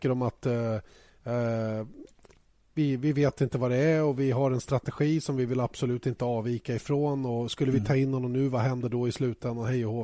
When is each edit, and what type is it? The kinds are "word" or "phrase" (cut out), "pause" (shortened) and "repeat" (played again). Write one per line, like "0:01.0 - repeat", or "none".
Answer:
none